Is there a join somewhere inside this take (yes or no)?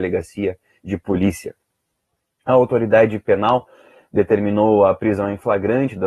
no